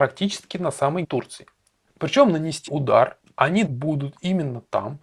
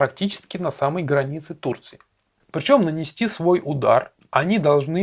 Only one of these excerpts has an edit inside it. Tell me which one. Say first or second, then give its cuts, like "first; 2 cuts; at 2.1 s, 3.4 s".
first; 3 cuts; at 1.0 s, 2.7 s, 3.7 s